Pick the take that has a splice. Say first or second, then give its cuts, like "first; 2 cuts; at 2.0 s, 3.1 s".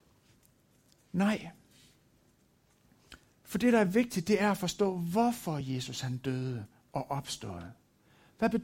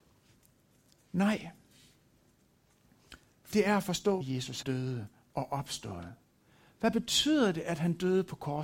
second; 3 cuts; at 3.5 s, 4.2 s, 4.6 s